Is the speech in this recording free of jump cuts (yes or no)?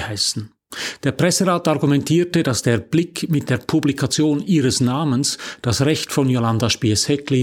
yes